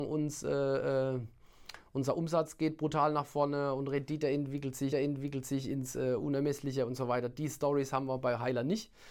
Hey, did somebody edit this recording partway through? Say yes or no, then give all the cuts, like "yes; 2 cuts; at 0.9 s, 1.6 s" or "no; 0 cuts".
yes; 1 cut; at 4.9 s